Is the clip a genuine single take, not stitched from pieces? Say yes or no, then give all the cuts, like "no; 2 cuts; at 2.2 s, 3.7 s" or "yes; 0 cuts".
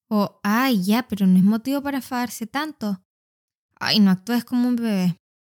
yes; 0 cuts